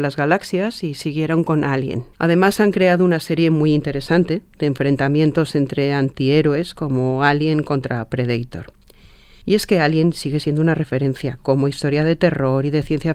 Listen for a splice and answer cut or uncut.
cut